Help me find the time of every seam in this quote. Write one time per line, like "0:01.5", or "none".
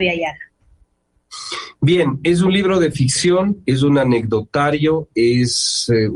none